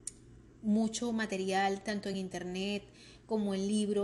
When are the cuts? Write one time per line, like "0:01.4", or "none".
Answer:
none